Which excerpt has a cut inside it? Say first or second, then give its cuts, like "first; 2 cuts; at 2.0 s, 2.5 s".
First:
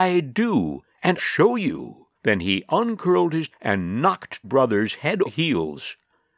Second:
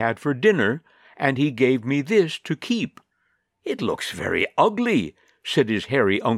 first; 5 cuts; at 1.2 s, 2.1 s, 3.5 s, 4.4 s, 5.3 s